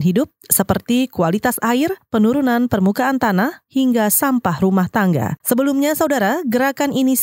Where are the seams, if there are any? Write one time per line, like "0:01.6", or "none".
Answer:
0:05.4